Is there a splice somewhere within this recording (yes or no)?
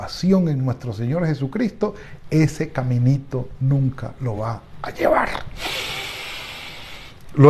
no